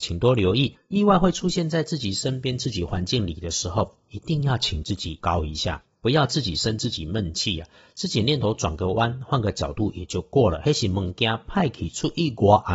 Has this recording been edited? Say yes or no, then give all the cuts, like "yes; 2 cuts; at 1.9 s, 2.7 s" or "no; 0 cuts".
yes; 1 cut; at 5.2 s